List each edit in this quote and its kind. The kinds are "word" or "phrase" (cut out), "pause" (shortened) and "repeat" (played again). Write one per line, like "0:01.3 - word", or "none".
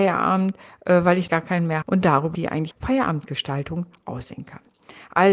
0:01.3 - word
0:01.8 - word
0:02.3 - word
0:02.7 - word